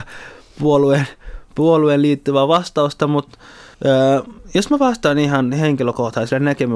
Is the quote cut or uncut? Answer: cut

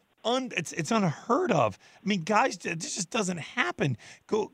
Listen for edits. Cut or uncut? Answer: uncut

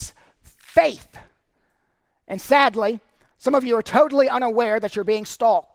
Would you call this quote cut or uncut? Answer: uncut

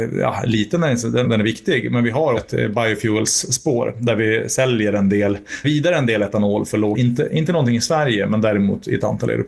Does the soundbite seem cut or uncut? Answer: cut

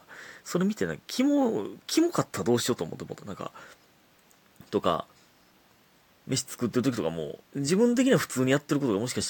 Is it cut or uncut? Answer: cut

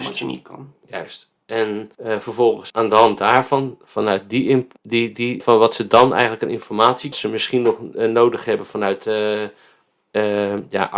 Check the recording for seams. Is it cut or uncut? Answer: cut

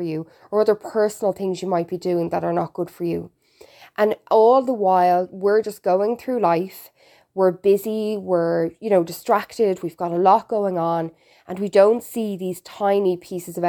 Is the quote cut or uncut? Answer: uncut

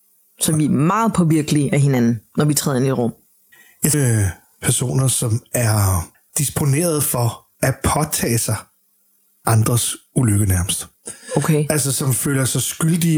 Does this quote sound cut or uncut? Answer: cut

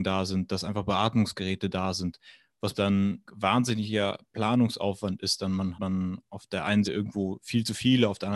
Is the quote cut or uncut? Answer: cut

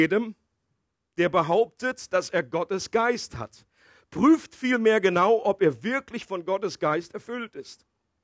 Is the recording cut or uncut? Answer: uncut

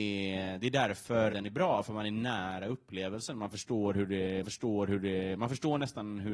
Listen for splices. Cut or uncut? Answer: cut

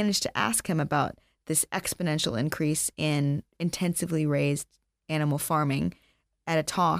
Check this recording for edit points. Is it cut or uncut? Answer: uncut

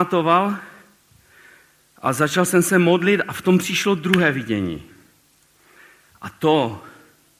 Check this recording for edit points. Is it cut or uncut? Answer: uncut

